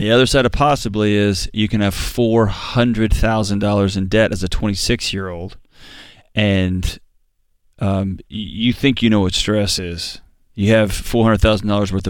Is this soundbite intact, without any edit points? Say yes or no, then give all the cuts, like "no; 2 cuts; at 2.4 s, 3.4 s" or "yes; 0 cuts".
yes; 0 cuts